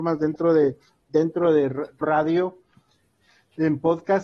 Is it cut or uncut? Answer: cut